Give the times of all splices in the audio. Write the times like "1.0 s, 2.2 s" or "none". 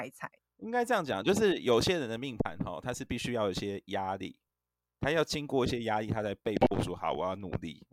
none